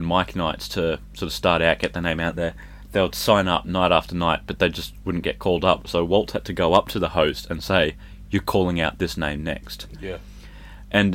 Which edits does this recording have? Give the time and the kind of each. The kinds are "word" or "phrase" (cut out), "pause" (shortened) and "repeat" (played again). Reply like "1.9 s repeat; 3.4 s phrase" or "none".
none